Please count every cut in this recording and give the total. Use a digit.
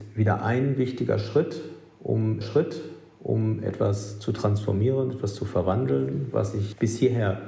1